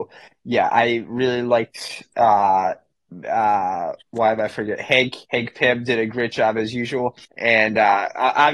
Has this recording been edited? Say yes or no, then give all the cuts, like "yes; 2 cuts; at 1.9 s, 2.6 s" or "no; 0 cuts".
yes; 3 cuts; at 4.0 s, 5.2 s, 7.3 s